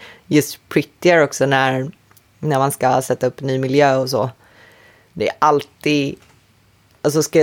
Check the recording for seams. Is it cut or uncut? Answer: uncut